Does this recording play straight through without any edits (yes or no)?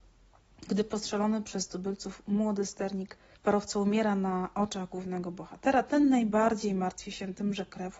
no